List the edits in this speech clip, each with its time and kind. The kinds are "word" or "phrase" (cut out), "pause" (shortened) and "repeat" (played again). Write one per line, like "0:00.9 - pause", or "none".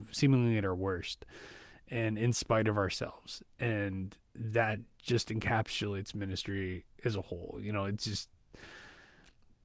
none